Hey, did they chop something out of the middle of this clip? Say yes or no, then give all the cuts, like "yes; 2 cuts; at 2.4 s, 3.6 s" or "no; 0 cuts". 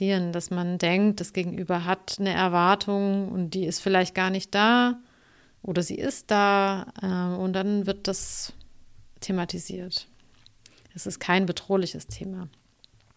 no; 0 cuts